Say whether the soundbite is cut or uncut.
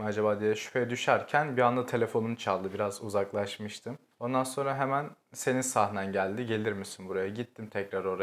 uncut